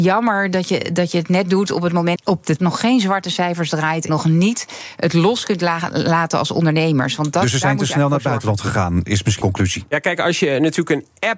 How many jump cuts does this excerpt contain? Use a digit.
4